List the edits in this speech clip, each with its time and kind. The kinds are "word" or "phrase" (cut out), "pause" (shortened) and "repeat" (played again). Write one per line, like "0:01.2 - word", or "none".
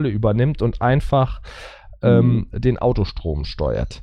none